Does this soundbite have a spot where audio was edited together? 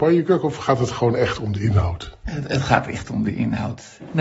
no; 0 cuts

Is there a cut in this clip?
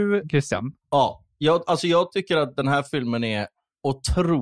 no; 0 cuts

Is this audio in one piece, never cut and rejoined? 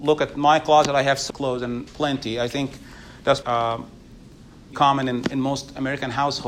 no; 4 cuts; at 1.3 s, 1.9 s, 3.4 s, 4.7 s

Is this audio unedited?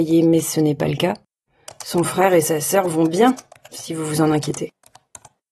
yes; 0 cuts

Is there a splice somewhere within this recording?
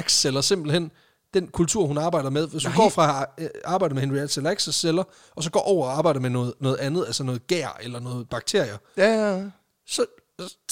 no; 0 cuts

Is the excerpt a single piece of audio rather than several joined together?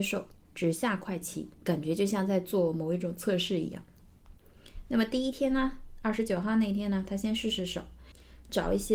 no; 1 cut; at 1.5 s

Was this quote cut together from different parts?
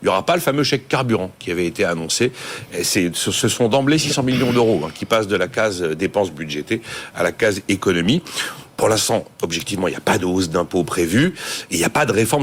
no; 0 cuts

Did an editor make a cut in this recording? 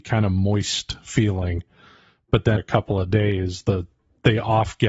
yes; 1 cut; at 2.6 s

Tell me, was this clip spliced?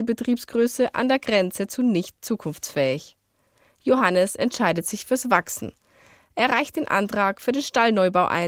no; 0 cuts

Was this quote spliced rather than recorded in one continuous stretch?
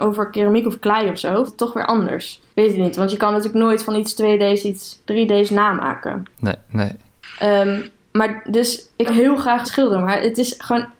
yes; 6 cuts; at 1.5 s, 2.5 s, 5.0 s, 6.3 s, 9.1 s, 9.6 s

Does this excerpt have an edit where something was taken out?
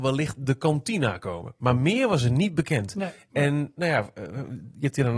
no; 0 cuts

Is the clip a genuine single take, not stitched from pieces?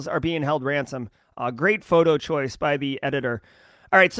yes; 0 cuts

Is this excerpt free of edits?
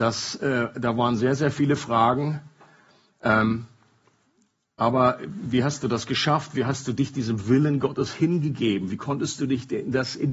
yes; 0 cuts

